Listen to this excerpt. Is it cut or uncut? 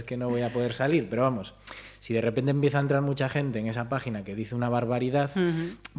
uncut